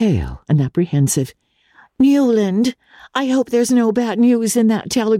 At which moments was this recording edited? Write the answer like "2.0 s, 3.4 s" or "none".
none